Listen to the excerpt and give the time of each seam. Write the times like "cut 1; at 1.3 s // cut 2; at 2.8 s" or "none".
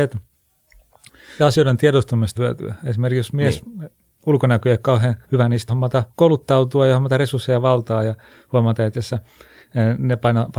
cut 1; at 1.4 s // cut 2; at 2.4 s // cut 3; at 5.2 s // cut 4; at 5.7 s // cut 5; at 6.1 s // cut 6; at 8.9 s